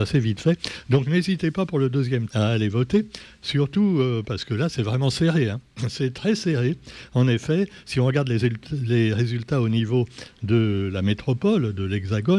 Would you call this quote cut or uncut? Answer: cut